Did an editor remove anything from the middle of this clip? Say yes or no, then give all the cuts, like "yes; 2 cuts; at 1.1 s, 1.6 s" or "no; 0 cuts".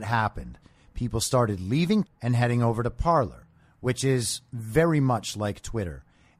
yes; 1 cut; at 2.0 s